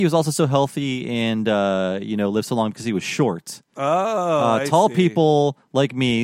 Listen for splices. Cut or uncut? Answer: uncut